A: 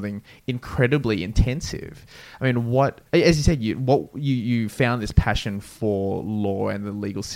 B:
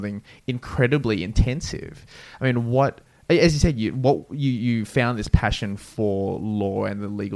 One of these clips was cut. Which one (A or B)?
A